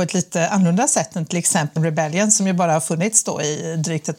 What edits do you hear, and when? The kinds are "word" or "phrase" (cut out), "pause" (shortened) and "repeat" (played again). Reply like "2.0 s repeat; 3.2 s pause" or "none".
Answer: 1.8 s word